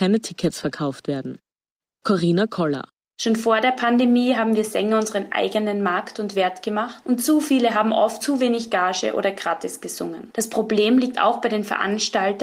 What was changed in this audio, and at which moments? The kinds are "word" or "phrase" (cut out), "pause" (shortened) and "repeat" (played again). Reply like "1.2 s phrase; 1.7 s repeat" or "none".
8.2 s word